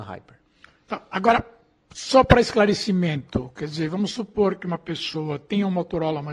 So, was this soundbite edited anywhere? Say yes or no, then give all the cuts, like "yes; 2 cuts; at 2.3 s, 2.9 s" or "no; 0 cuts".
no; 0 cuts